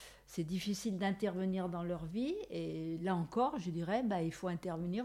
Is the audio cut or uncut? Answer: uncut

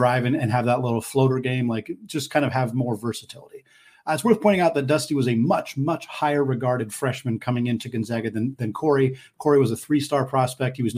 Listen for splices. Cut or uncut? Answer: uncut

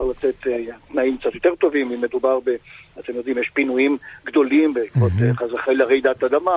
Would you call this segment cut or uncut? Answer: uncut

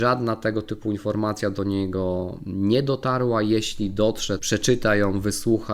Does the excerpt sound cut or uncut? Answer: cut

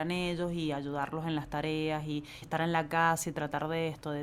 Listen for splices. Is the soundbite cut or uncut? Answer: cut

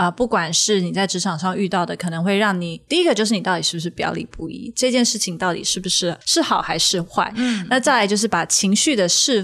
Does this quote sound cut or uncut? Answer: cut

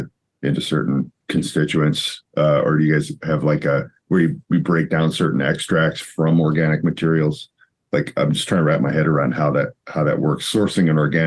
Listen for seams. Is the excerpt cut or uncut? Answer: cut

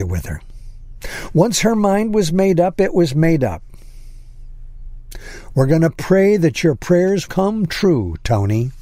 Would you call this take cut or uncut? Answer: cut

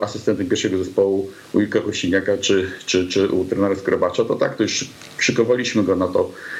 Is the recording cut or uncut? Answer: uncut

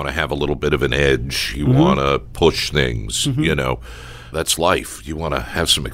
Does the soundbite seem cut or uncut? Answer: cut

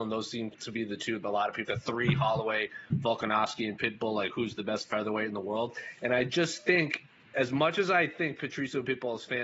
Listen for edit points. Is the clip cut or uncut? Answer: cut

